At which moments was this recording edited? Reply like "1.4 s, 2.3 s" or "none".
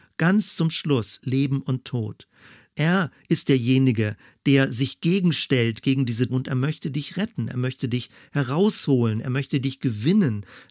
1.2 s, 6.3 s